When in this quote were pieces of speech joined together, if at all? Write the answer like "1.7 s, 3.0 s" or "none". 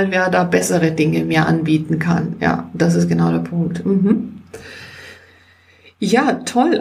none